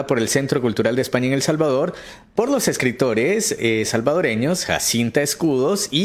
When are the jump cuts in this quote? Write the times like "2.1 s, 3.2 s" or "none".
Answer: none